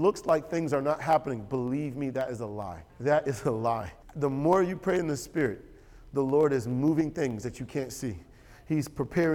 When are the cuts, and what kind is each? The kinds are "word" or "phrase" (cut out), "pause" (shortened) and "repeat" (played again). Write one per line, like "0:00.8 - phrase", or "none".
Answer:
0:02.9 - pause
0:04.0 - pause